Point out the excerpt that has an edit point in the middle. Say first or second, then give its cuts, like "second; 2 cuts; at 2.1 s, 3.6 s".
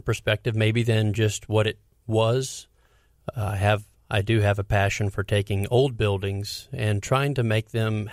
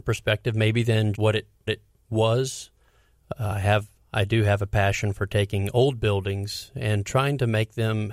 second; 2 cuts; at 1.1 s, 1.7 s